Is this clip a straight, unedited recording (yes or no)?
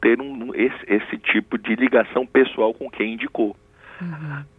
yes